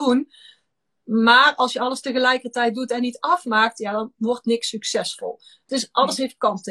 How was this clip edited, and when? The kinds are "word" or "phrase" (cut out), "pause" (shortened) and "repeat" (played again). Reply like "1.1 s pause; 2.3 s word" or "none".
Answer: 5.7 s word